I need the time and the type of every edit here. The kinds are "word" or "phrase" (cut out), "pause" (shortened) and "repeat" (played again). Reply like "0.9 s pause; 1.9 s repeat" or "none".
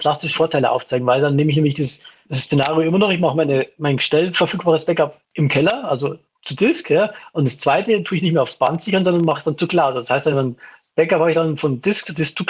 none